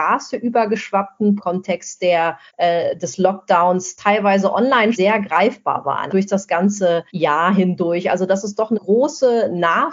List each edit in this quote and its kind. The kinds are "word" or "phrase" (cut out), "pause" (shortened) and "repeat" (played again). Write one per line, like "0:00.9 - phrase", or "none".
0:01.4 - phrase
0:02.5 - pause
0:04.9 - word
0:06.1 - word
0:07.1 - pause
0:08.7 - word